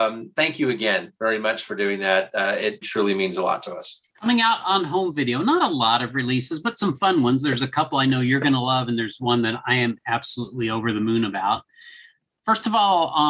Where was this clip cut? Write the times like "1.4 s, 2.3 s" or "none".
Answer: 2.8 s, 4.1 s